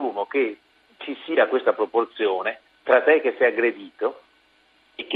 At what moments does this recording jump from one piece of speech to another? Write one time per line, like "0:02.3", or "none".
none